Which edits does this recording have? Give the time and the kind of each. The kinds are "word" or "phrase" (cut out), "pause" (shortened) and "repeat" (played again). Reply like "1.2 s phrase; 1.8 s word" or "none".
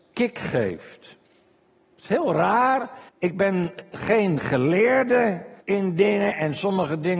3.1 s pause; 5.6 s pause